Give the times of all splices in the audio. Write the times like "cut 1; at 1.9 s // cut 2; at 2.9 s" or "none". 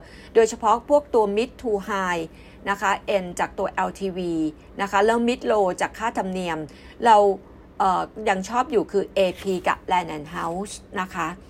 none